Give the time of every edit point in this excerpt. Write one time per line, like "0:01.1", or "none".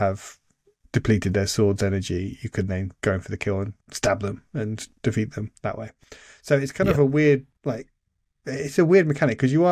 0:03.8
0:07.5